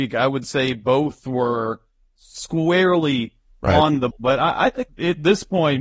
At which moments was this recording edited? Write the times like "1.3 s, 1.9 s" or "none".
4.1 s, 4.9 s